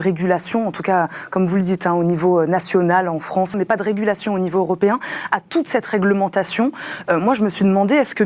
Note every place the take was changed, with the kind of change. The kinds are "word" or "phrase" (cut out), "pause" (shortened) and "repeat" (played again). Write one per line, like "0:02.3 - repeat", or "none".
0:03.5 - word